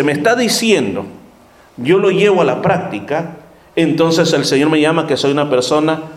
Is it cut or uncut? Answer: uncut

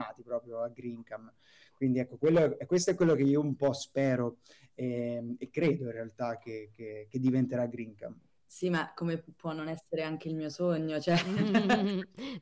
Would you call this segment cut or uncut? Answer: uncut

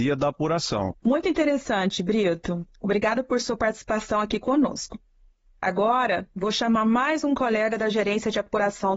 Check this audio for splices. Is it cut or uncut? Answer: cut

